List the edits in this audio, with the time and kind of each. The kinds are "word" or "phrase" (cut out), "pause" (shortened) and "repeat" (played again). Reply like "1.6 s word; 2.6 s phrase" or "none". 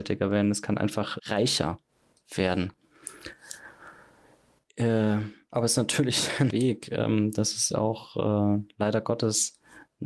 1.2 s word; 6.5 s word; 7.7 s word